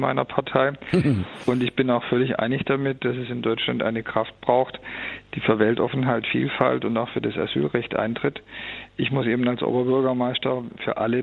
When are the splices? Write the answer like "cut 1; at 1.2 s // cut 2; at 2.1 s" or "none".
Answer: none